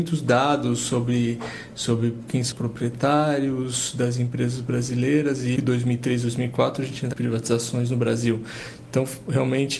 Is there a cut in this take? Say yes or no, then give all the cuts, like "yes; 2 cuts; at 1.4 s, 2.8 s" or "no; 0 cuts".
yes; 3 cuts; at 2.5 s, 5.6 s, 7.1 s